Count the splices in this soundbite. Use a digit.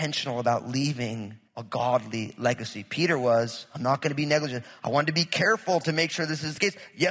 1